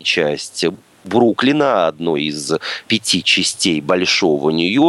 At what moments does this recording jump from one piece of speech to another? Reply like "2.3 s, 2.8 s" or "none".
none